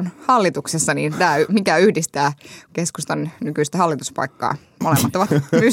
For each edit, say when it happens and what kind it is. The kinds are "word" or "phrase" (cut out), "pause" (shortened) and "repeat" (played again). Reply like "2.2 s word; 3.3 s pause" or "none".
2.7 s phrase